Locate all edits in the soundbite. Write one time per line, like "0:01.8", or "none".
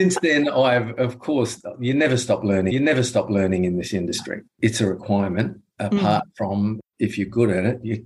0:02.7